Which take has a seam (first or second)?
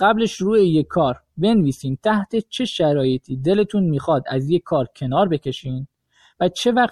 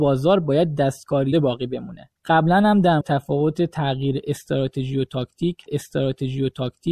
second